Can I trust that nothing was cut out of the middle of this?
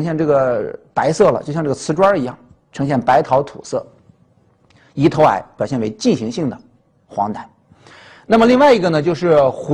no; 1 cut; at 2.7 s

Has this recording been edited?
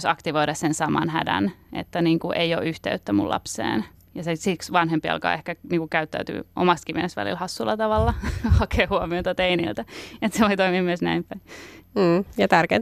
no; 0 cuts

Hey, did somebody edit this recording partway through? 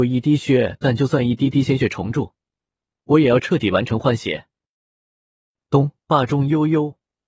yes; 1 cut; at 6.0 s

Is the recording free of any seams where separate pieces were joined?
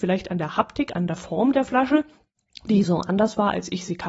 yes; 0 cuts

